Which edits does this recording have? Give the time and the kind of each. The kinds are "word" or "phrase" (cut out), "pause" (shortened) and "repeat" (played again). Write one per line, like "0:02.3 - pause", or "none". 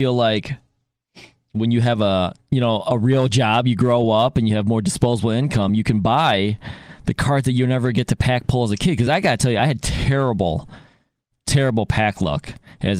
none